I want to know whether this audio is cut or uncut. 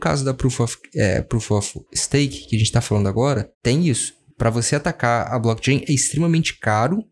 cut